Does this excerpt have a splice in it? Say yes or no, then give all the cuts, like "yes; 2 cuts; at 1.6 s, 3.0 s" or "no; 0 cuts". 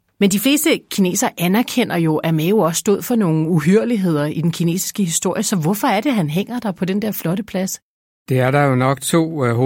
no; 0 cuts